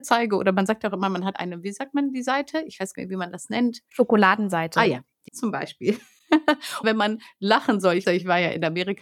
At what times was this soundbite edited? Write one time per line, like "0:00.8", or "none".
0:01.3
0:02.9
0:05.3
0:06.8
0:08.0